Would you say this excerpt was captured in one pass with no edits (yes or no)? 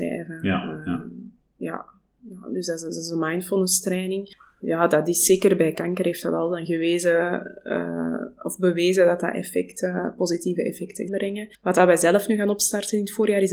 no